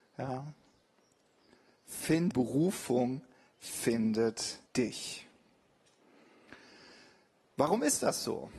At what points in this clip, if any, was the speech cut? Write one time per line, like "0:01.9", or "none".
0:02.3
0:04.7